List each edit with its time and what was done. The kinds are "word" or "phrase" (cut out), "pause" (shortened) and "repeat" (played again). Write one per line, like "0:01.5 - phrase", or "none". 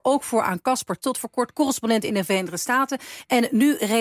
0:01.0 - word